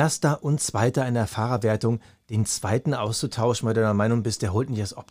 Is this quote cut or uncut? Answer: uncut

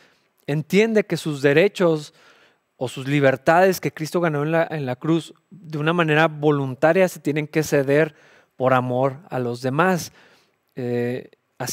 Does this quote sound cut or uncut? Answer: uncut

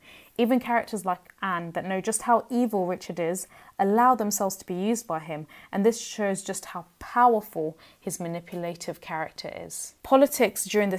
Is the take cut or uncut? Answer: cut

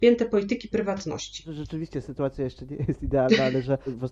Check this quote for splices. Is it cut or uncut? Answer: uncut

